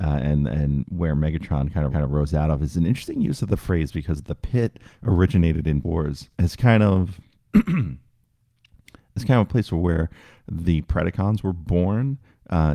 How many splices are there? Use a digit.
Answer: 3